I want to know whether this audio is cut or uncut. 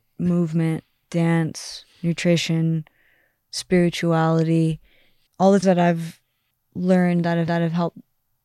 cut